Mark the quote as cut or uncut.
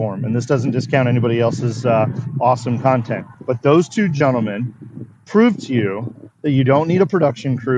cut